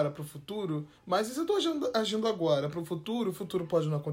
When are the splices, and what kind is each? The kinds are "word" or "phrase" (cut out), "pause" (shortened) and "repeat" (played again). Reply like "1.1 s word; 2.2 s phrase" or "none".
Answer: 1.0 s pause